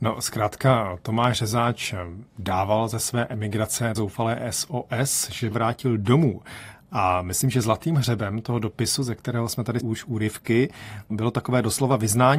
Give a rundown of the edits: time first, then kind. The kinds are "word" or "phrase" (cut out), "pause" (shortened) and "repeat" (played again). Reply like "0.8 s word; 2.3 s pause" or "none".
2.3 s pause; 4.0 s word; 5.5 s phrase; 9.8 s word